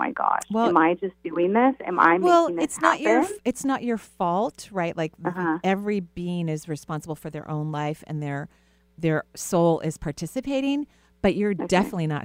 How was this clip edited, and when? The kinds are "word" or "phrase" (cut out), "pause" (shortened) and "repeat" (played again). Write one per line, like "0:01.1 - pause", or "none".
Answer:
none